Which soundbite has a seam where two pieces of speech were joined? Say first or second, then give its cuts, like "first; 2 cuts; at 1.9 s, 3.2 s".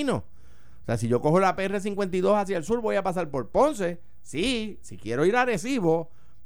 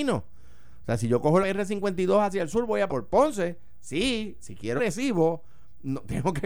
second; 3 cuts; at 1.4 s, 2.9 s, 4.8 s